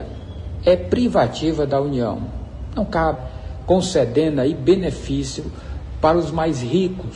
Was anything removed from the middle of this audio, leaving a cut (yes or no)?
yes